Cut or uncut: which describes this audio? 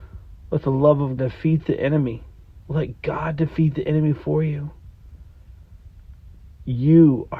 cut